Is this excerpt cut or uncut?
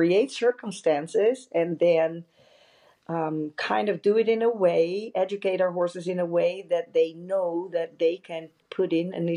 uncut